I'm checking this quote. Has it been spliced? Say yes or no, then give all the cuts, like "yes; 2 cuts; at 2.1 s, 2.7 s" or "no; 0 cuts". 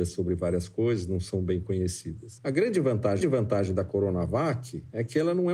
yes; 1 cut; at 3.2 s